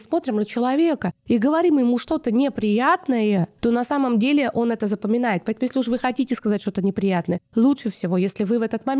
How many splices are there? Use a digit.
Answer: 0